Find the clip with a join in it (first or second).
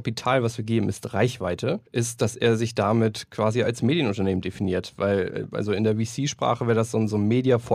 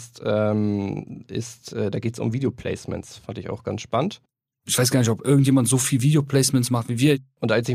first